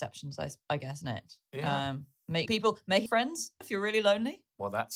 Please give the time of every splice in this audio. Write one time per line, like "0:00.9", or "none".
0:01.0
0:02.5
0:03.1
0:03.6